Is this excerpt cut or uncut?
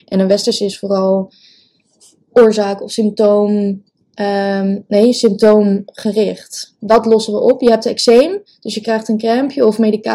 uncut